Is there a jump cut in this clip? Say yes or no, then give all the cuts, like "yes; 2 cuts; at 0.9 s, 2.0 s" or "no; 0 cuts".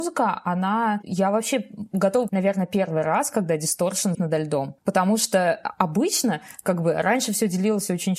yes; 3 cuts; at 2.3 s, 4.1 s, 4.8 s